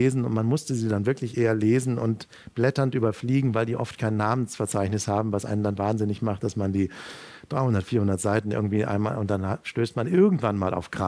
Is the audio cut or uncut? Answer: uncut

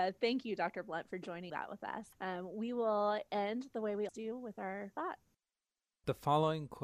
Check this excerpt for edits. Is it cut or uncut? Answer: cut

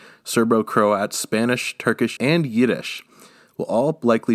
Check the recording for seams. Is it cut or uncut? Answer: cut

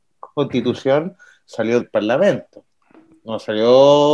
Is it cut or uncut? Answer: cut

